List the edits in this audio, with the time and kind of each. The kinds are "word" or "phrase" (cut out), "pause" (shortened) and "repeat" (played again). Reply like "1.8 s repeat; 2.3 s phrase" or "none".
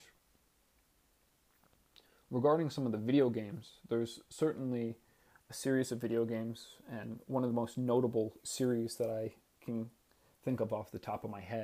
none